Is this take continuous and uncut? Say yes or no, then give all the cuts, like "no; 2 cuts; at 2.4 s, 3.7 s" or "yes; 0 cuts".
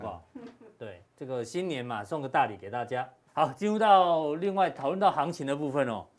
no; 2 cuts; at 1.1 s, 3.3 s